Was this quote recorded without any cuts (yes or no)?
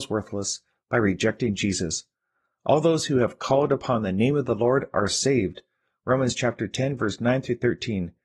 yes